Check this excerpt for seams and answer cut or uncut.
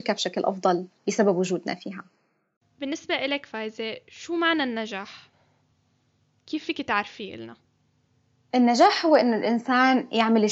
uncut